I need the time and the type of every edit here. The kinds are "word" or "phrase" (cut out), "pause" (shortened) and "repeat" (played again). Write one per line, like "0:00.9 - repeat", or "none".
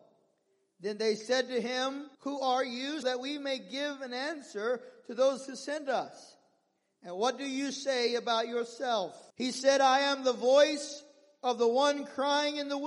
0:02.1 - pause
0:03.0 - word
0:09.3 - pause